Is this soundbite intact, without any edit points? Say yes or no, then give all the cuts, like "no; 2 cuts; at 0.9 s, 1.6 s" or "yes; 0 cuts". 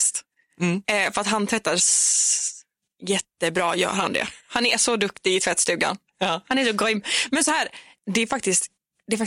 yes; 0 cuts